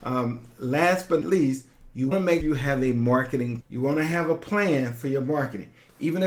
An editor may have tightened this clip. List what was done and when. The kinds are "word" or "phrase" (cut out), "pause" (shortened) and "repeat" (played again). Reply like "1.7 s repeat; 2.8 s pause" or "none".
1.2 s word; 2.1 s word; 2.4 s word; 3.6 s word